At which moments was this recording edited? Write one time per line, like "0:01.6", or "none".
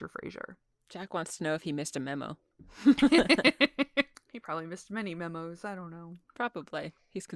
none

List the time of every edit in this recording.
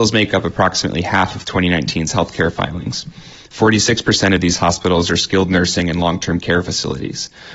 none

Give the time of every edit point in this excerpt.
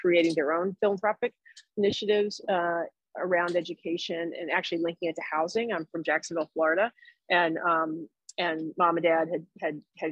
none

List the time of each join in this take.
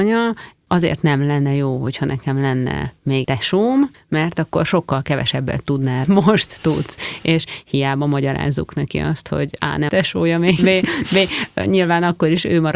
0:03.2
0:06.0
0:09.9
0:10.6

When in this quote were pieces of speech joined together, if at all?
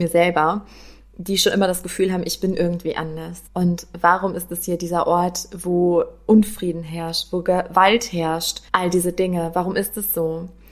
0:03.5
0:08.7

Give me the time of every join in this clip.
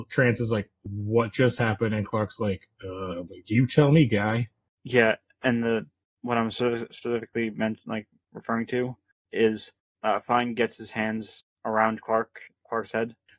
none

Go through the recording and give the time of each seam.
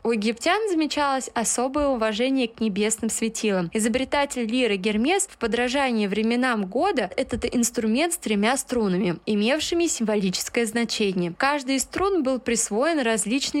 0:07.1

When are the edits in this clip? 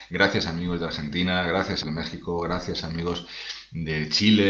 0:01.8

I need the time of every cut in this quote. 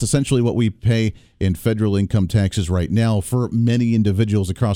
none

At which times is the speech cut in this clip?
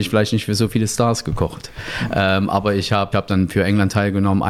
0:03.1

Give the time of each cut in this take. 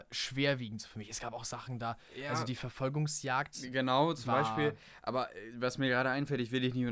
none

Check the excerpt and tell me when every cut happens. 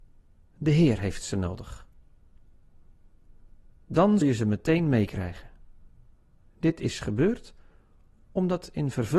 0:04.2
0:06.1

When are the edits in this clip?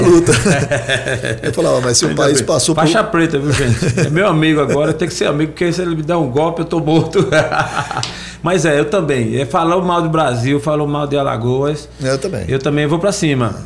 none

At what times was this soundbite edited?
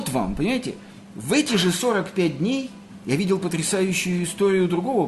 none

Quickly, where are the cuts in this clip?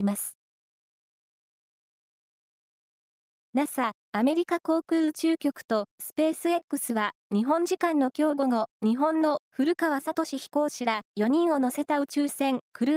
0:04.0
0:07.2
0:08.7

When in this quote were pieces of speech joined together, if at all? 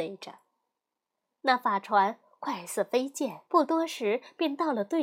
0:03.5

